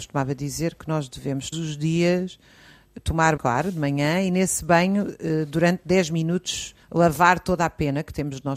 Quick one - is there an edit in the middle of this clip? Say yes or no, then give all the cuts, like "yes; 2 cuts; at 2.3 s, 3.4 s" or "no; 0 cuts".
yes; 3 cuts; at 1.5 s, 3.4 s, 6.8 s